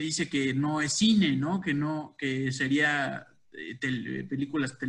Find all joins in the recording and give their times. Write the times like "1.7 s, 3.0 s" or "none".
none

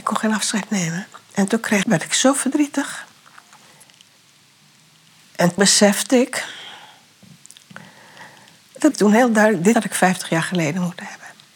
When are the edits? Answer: 1.8 s, 5.6 s, 8.9 s, 9.7 s

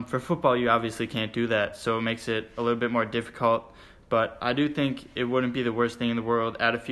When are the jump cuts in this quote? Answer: none

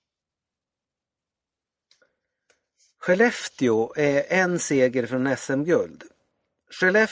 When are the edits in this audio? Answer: none

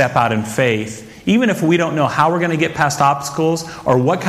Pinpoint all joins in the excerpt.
none

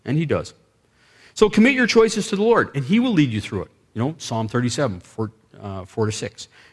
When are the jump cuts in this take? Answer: none

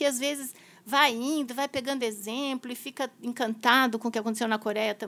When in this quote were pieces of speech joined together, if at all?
none

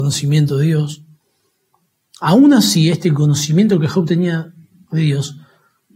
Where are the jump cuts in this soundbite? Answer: none

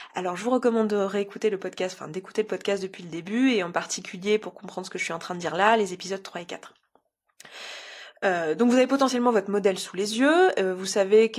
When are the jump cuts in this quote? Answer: none

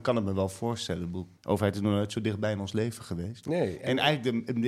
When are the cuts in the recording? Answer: 1.4 s

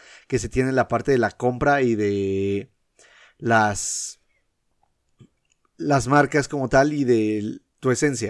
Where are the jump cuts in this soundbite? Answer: none

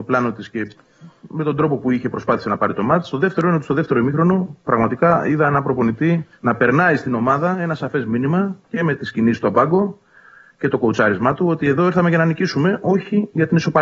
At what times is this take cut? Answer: 6.3 s, 9.5 s

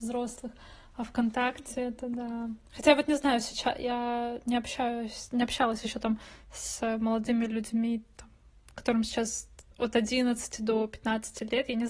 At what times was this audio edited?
2.7 s, 9.7 s

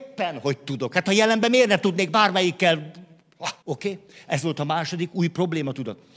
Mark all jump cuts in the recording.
3.6 s

